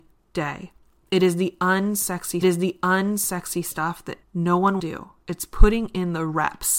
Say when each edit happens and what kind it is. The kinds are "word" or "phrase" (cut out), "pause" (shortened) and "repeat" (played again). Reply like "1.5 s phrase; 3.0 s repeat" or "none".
2.4 s repeat; 4.2 s pause; 4.8 s phrase